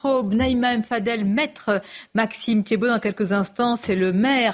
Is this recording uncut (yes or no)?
yes